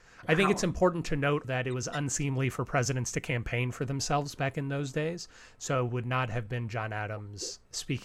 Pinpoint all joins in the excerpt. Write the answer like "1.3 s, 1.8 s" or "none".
1.4 s